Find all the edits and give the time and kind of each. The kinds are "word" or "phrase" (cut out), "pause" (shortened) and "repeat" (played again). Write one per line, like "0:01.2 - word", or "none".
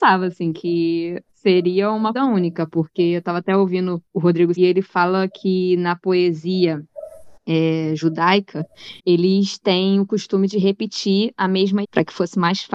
0:01.3 - pause
0:02.1 - word
0:04.1 - pause
0:04.6 - phrase
0:07.4 - pause
0:09.0 - pause
0:11.8 - word